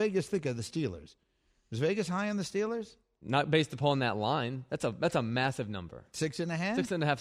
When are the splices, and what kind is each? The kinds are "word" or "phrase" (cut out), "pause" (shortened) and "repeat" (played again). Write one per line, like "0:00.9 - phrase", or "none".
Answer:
none